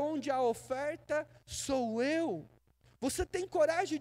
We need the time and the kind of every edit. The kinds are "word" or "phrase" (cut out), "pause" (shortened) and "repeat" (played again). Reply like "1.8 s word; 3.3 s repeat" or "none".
none